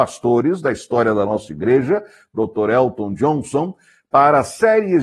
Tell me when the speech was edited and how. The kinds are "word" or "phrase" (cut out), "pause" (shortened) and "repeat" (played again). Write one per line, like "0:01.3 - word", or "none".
none